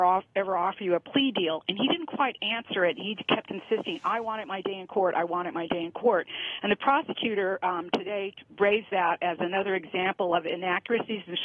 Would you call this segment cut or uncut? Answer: uncut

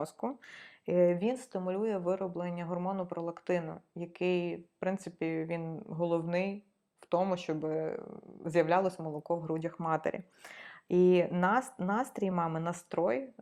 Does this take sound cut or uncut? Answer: uncut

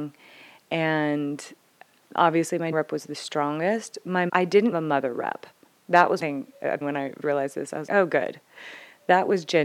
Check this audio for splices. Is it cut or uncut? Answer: cut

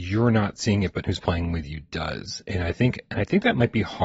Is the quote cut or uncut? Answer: cut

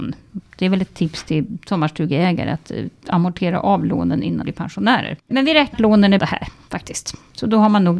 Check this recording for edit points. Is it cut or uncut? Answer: cut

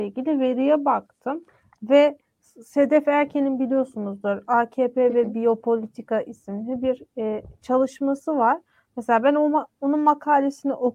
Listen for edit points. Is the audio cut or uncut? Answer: uncut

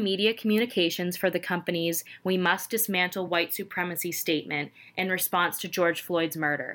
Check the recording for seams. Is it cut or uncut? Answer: uncut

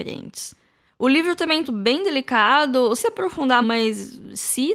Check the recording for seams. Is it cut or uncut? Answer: cut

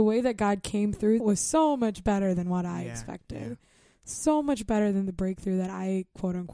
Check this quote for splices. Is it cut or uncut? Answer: cut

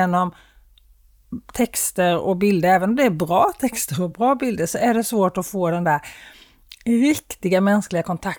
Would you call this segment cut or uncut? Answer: uncut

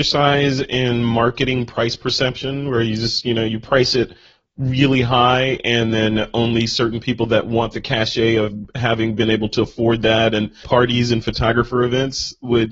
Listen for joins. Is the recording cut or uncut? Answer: cut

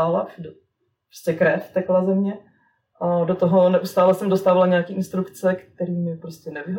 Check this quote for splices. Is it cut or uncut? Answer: uncut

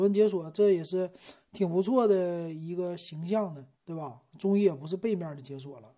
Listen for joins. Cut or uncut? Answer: cut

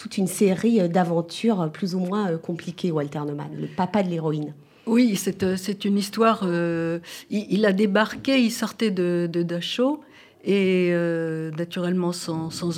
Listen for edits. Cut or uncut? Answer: uncut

